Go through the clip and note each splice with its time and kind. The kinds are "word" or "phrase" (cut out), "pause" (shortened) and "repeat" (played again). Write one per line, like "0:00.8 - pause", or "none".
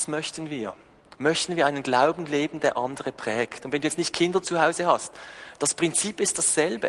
none